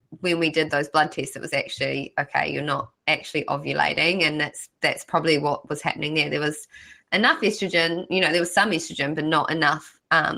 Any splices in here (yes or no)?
no